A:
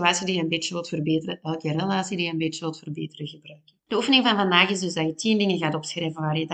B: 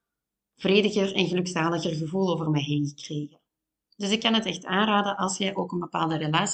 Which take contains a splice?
A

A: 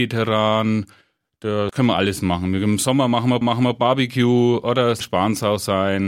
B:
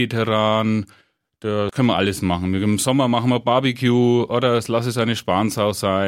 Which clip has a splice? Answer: A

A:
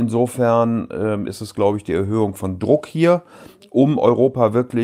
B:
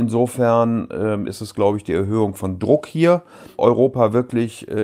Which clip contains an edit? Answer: B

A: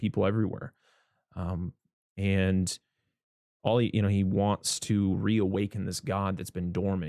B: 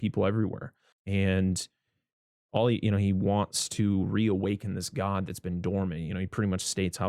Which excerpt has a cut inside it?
B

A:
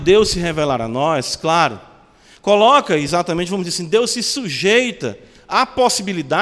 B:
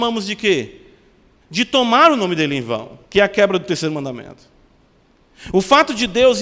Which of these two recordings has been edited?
B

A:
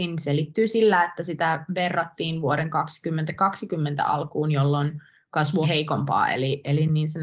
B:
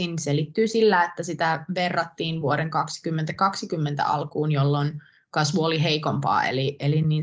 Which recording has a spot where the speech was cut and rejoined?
A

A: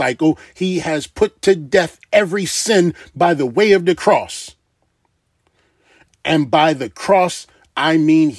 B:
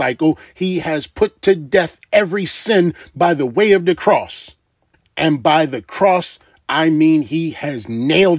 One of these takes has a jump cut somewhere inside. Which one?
B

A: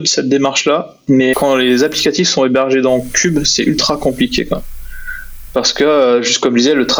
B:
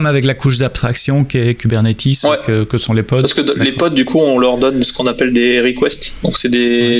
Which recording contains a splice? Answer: A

